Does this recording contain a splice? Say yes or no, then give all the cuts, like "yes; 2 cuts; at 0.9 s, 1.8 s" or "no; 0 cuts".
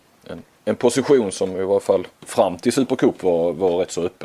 yes; 1 cut; at 2.1 s